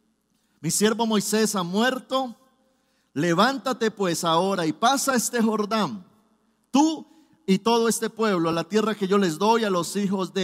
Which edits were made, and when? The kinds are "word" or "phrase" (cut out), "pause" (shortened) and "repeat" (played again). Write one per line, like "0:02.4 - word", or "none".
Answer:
none